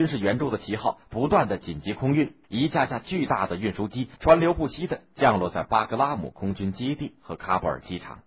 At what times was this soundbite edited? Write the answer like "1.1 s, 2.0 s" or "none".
2.4 s, 4.1 s